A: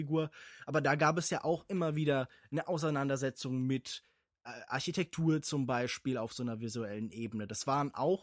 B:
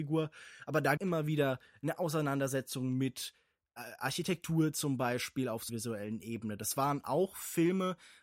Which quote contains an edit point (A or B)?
B